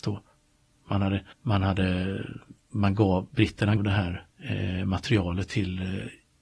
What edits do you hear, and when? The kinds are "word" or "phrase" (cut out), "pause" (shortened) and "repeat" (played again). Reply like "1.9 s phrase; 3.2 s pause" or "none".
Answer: 1.3 s pause; 2.6 s pause; 3.8 s word; 4.3 s pause